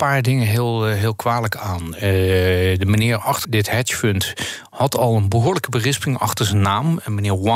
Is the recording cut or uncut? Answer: cut